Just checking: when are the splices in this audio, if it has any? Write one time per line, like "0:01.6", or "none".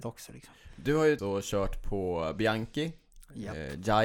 0:01.2